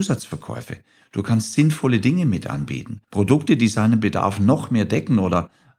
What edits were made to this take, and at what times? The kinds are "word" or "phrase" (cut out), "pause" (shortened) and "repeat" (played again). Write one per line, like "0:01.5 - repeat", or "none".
0:03.0 - pause